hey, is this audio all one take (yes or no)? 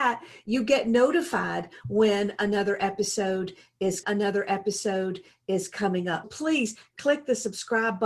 no